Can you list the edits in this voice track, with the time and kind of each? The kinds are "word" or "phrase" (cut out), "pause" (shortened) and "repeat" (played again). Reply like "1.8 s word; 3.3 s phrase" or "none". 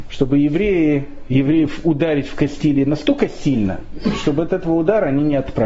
none